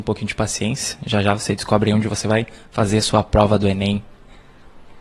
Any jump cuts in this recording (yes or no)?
no